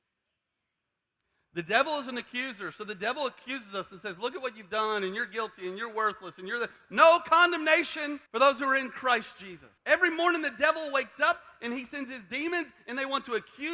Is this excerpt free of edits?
no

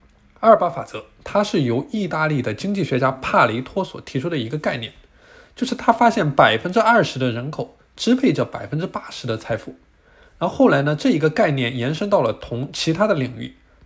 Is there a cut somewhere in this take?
no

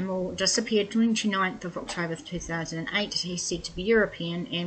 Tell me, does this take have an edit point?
no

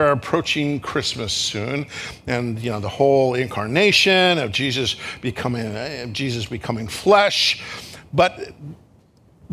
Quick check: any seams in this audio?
no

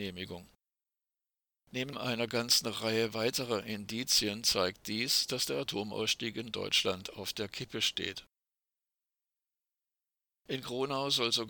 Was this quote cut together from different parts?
no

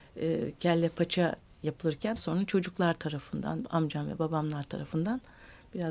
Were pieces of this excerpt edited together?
yes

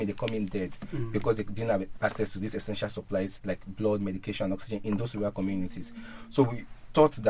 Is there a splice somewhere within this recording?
no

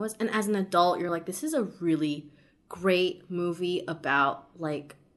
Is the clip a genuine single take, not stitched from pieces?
yes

